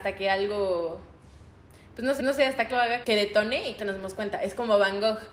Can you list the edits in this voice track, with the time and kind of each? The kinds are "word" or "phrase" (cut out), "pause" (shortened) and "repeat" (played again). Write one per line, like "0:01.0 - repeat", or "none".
0:02.2 - repeat
0:02.7 - word
0:03.0 - word
0:03.8 - word